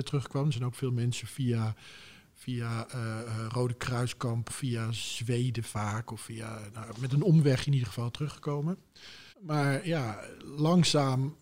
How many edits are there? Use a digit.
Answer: 2